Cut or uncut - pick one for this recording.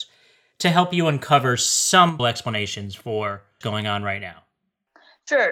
cut